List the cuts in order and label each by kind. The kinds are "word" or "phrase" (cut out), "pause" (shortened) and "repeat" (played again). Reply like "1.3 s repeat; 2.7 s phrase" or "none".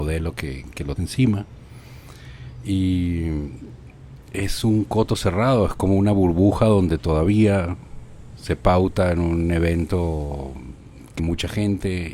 1.0 s word; 11.2 s word